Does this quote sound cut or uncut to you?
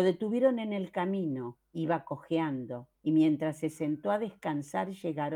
cut